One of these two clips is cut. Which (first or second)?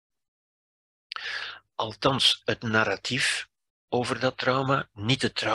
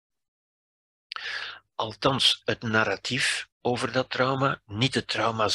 second